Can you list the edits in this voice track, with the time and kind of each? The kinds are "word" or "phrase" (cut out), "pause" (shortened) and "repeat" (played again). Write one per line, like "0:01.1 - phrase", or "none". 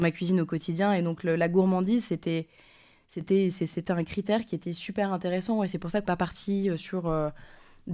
0:06.0 - word

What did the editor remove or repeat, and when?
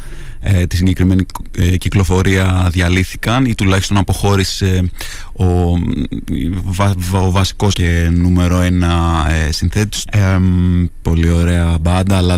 0:07.7 - word
0:10.1 - word
0:11.0 - word

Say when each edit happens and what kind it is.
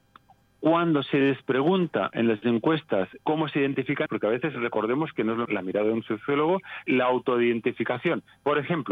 0:04.1 - word
0:05.5 - word
0:06.9 - word

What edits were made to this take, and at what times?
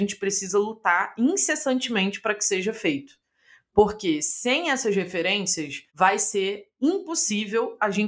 0:05.9 - pause

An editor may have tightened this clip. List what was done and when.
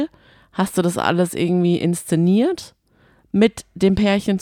none

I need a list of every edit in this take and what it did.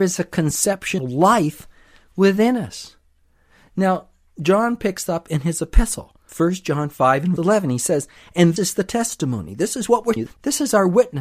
0:01.0 - word
0:05.1 - word
0:07.4 - word
0:08.6 - word
0:10.2 - word

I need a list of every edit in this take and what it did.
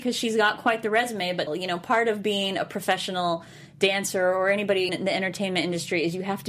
0:01.5 - word
0:04.9 - word

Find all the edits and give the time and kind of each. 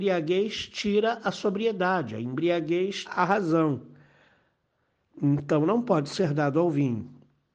0:03.1 - word

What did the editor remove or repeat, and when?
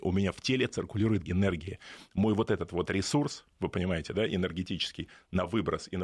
0:01.2 - word

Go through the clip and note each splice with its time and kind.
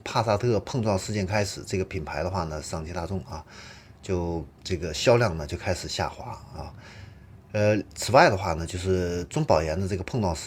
0:04.5 - pause

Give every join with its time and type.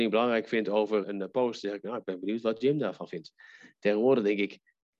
0:01.0 - word

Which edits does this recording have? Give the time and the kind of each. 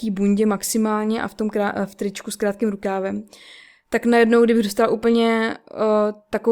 none

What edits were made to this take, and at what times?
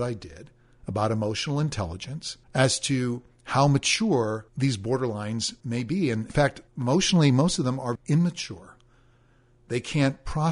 0:02.4 - pause
0:04.5 - pause
0:05.6 - pause
0:06.3 - word
0:06.7 - pause
0:08.0 - word

